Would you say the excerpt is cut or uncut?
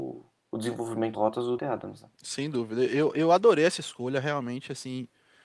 cut